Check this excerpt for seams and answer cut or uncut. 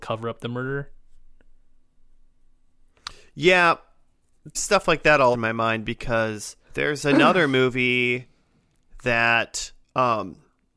cut